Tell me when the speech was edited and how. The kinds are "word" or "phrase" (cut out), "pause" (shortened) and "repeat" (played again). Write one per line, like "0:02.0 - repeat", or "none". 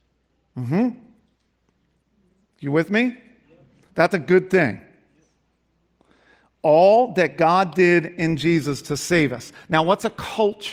none